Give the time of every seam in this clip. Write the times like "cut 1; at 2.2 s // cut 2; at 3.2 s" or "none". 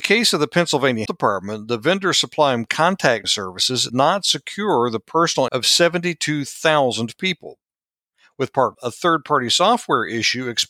cut 1; at 1.1 s // cut 2; at 2.7 s // cut 3; at 3.2 s // cut 4; at 3.9 s // cut 5; at 5.5 s // cut 6; at 8.7 s